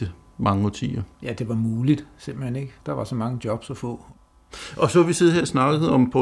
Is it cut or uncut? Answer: cut